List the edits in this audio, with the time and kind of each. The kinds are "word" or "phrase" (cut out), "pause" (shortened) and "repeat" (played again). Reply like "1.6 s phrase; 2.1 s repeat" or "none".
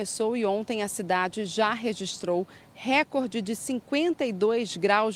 none